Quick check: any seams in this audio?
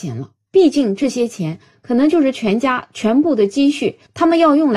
no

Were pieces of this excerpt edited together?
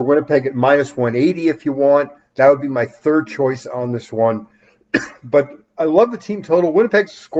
no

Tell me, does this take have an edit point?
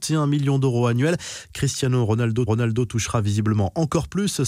yes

